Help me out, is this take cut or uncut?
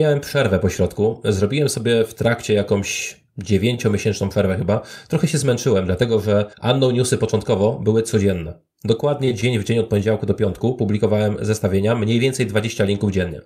cut